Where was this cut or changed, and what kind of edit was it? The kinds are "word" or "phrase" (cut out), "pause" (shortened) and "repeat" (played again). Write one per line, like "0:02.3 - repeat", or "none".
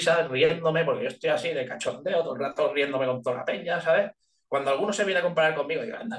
none